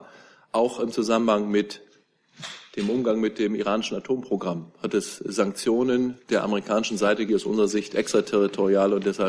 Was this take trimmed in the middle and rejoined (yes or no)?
yes